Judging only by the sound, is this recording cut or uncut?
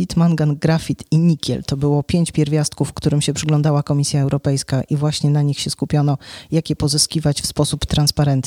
uncut